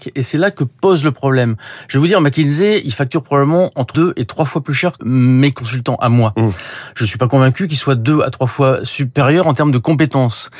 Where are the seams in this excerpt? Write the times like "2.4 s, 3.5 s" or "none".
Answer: 3.9 s, 5.0 s